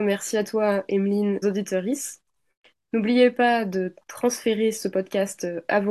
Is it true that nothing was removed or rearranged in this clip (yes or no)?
no